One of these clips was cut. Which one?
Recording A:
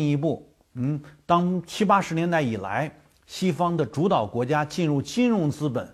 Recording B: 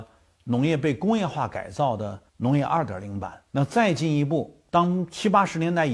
B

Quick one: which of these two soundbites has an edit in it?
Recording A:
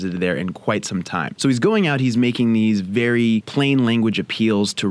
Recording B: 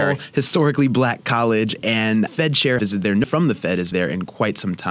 B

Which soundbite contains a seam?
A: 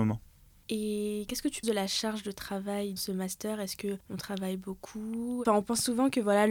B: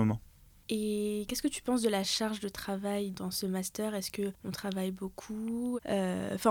A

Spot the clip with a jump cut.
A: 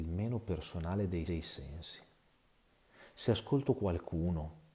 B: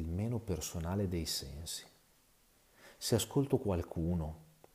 A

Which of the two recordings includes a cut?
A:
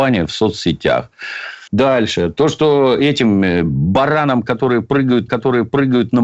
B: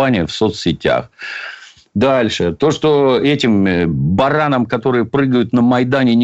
A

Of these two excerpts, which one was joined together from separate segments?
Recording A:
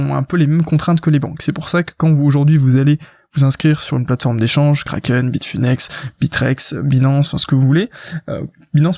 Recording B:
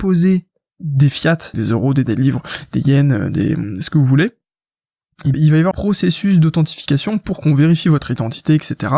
B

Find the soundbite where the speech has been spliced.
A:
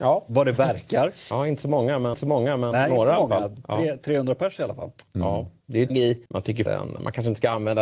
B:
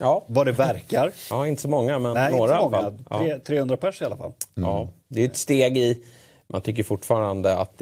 A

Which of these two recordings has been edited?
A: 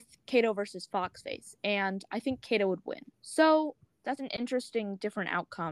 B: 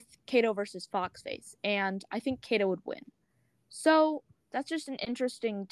A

